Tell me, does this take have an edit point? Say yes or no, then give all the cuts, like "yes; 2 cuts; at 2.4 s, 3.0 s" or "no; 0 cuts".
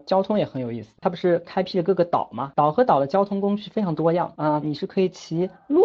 yes; 1 cut; at 4.6 s